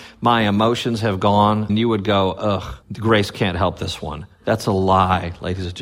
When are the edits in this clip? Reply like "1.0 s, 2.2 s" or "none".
1.7 s, 2.8 s